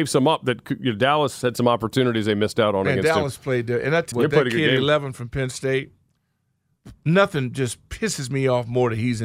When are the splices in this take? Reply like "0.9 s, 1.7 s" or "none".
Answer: 4.1 s

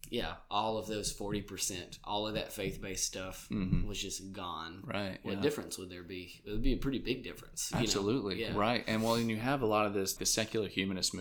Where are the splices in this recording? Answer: 10.2 s

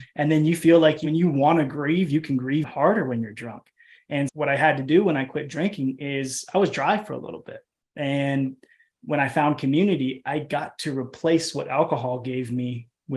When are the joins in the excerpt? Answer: 2.6 s, 4.3 s

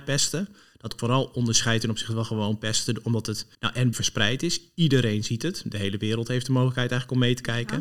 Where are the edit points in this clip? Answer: 1.0 s, 3.5 s, 3.9 s

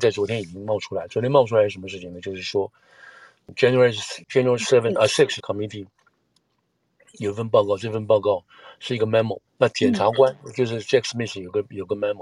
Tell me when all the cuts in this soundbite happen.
4.2 s, 5.4 s, 9.5 s

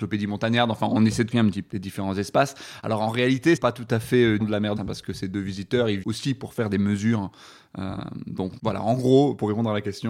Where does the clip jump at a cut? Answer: 1.3 s, 1.7 s, 3.6 s, 4.4 s, 4.8 s, 6.0 s, 8.6 s

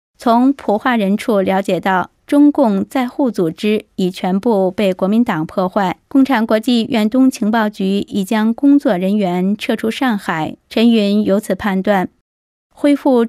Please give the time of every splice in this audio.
2.2 s, 6.1 s, 10.6 s

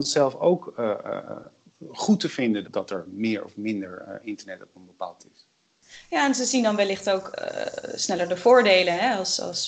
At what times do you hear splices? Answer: 2.6 s, 5.2 s

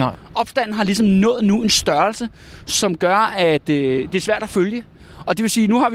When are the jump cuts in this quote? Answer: none

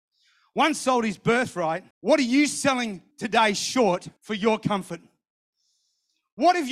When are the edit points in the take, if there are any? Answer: 1.9 s, 3.1 s, 4.2 s

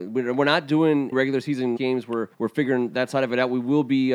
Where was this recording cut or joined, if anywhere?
1.1 s, 1.8 s, 2.3 s

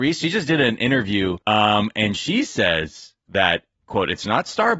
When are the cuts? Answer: 1.4 s

